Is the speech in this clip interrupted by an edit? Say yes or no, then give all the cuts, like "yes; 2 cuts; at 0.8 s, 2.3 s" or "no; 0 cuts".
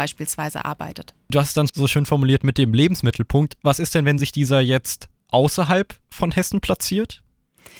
no; 0 cuts